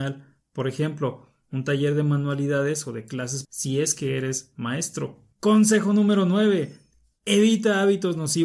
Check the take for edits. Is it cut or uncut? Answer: cut